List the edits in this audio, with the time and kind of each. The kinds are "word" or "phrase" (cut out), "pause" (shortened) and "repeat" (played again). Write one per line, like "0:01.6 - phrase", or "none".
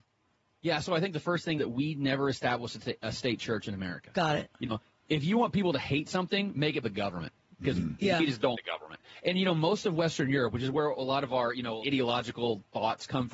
0:01.6 - word
0:06.8 - word
0:08.5 - word
0:11.8 - word